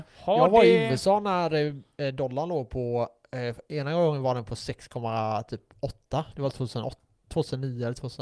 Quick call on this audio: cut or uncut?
uncut